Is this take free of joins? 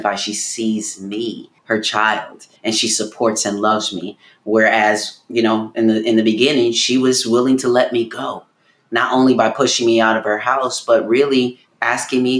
no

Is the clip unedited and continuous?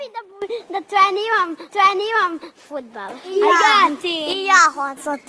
no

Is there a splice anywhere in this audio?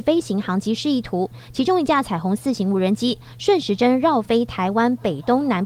no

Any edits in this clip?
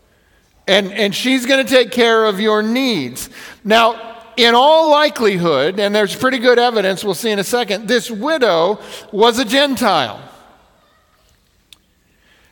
no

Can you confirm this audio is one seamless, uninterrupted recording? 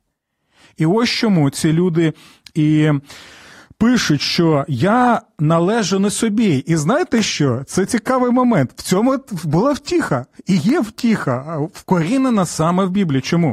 yes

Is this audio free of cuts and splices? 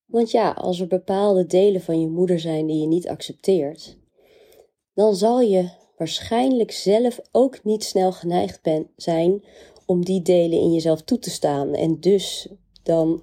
yes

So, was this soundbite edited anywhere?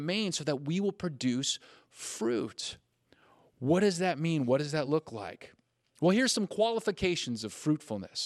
no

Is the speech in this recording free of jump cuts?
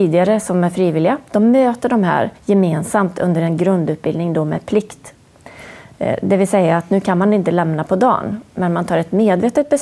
no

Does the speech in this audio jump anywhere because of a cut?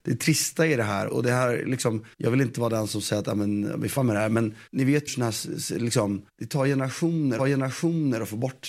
yes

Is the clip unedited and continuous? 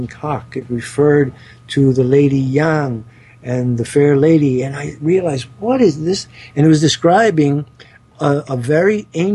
yes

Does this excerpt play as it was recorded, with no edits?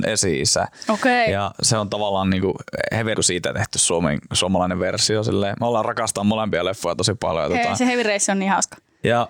no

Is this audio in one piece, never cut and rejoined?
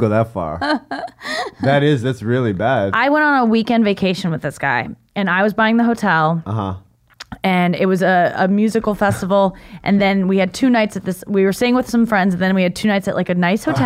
yes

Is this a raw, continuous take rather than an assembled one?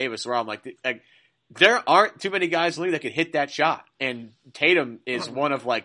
yes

